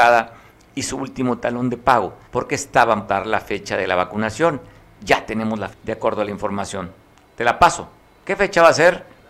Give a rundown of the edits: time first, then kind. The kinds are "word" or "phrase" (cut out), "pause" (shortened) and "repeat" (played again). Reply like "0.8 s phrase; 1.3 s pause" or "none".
2.2 s pause; 3.1 s word; 5.7 s word

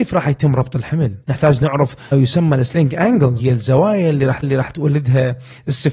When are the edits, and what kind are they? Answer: 1.2 s pause; 2.1 s word; 3.4 s word; 4.4 s repeat

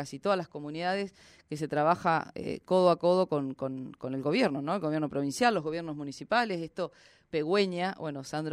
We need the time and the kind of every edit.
none

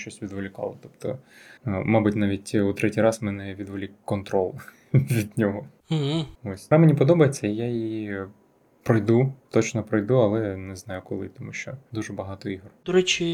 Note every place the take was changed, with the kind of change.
1.6 s pause; 6.7 s phrase

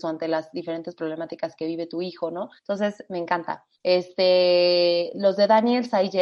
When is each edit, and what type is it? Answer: 2.6 s pause; 3.7 s pause

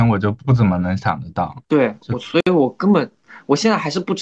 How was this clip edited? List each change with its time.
1.6 s pause

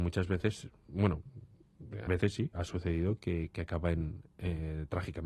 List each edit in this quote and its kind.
2.1 s word; 2.5 s word

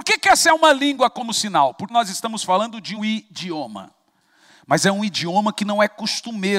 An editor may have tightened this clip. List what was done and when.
1.9 s word; 3.0 s word

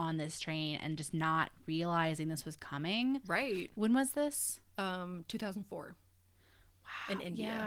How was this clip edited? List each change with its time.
none

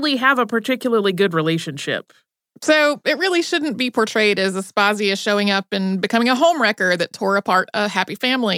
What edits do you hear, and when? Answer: none

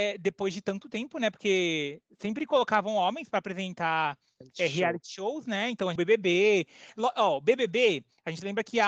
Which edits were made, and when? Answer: 6.0 s phrase

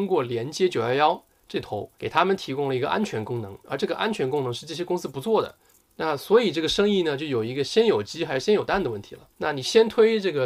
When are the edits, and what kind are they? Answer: 1.9 s pause; 5.7 s pause; 9.3 s pause

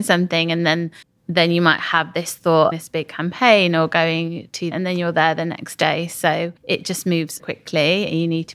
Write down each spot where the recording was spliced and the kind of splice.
1.0 s pause; 2.7 s phrase; 4.7 s phrase; 6.6 s pause; 7.4 s word

